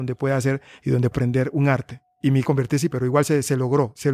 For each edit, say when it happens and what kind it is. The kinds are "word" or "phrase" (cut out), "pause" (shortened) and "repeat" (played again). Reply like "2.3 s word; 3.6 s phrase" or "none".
1.1 s word; 2.4 s phrase; 2.9 s phrase